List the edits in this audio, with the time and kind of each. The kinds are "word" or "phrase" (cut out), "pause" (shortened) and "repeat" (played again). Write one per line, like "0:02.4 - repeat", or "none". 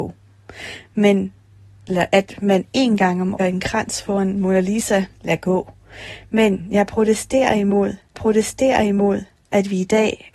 0:03.4 - phrase
0:05.1 - pause
0:08.1 - repeat